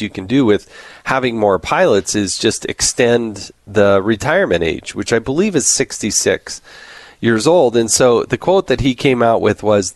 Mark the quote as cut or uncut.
uncut